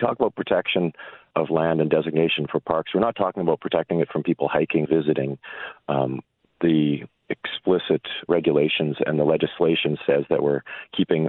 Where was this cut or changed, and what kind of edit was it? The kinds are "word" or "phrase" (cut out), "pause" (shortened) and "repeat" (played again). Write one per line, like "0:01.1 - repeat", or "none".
0:01.3 - word
0:04.8 - word
0:08.3 - word